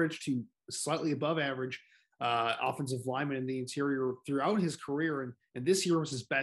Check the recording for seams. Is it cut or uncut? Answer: uncut